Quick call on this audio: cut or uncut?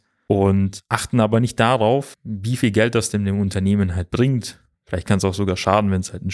uncut